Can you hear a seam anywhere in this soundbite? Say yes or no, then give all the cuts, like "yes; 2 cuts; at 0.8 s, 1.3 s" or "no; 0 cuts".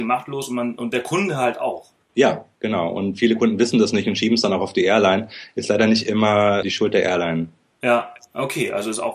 yes; 2 cuts; at 2.0 s, 6.6 s